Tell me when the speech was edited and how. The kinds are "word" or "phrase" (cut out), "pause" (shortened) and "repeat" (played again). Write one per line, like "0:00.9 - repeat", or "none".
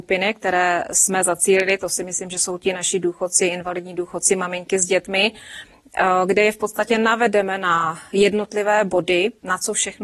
none